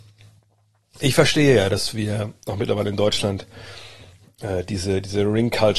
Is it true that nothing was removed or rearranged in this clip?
yes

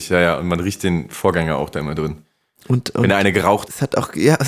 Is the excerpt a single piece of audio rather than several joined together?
yes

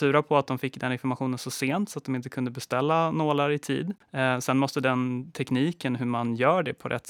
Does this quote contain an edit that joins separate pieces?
yes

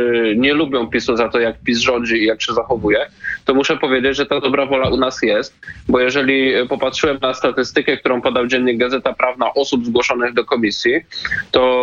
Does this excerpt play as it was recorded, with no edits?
yes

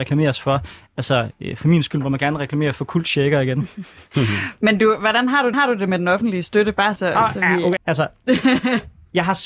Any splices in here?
yes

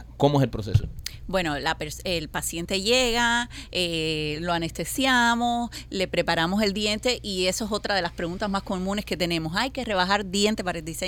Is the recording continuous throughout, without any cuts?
yes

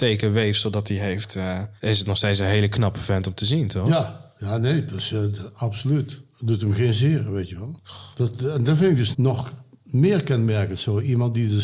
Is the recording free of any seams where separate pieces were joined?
no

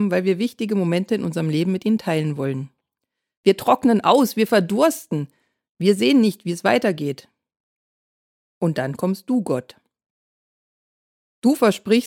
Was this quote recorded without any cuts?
yes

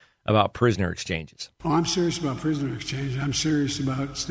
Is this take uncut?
no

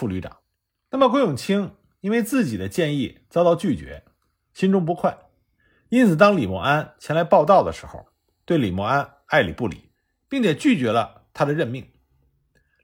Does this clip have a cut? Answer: no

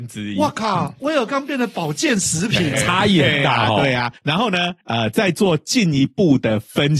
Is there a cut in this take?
yes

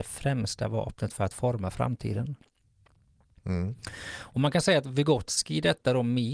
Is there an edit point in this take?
no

